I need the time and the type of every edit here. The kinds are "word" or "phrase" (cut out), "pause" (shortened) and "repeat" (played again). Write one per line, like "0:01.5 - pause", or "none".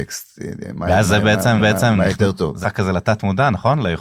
0:01.6 - repeat
0:02.6 - word